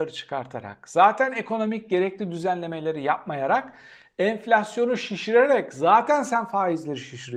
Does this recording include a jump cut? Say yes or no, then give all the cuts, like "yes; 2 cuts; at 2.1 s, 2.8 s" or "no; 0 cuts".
no; 0 cuts